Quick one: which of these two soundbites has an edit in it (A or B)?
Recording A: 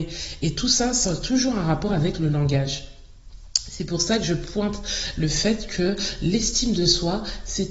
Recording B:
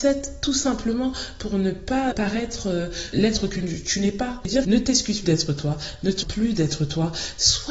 B